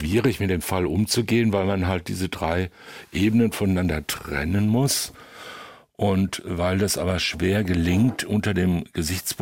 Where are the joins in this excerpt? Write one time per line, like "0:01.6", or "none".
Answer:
none